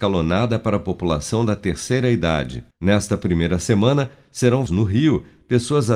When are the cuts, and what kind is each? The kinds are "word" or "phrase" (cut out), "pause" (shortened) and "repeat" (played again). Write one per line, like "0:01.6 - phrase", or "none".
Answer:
0:02.7 - pause
0:04.7 - word